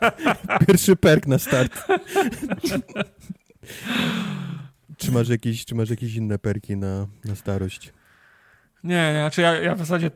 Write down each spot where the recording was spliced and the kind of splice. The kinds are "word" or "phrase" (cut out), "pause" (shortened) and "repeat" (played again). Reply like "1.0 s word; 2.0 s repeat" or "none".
none